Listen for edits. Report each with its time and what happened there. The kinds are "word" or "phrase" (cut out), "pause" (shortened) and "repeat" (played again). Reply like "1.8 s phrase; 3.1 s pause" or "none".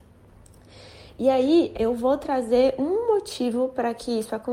1.7 s word